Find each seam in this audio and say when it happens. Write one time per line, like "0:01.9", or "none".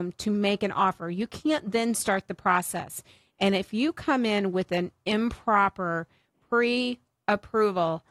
none